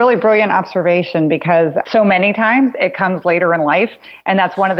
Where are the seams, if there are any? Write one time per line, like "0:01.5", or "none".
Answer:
0:01.8